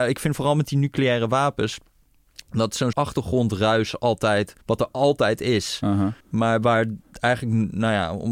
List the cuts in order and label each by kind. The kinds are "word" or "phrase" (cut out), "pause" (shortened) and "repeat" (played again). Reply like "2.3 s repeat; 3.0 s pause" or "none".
2.9 s word; 4.6 s pause; 6.2 s pause

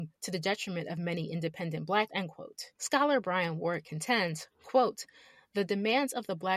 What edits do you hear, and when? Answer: 2.1 s word

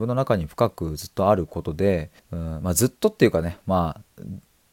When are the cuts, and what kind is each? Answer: 2.2 s pause

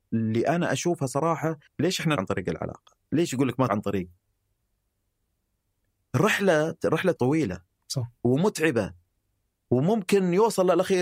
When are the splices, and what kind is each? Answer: 1.7 s word; 2.2 s word; 3.7 s word; 7.2 s word

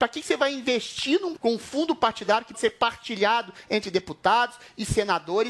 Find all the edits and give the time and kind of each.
1.4 s word; 2.5 s word

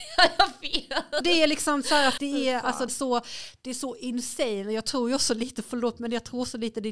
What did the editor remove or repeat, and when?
1.2 s word; 2.2 s word; 2.9 s word

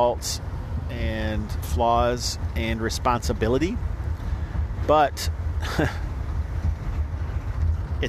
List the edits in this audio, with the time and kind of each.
none

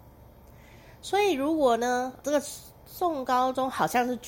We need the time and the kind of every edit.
2.2 s word

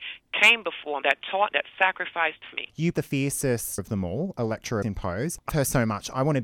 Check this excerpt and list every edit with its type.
1.0 s word; 1.5 s word; 2.5 s word; 2.9 s word; 3.8 s word; 4.8 s word; 5.5 s word

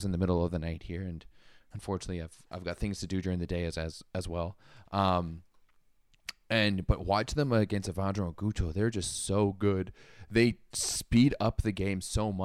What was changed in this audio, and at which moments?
none

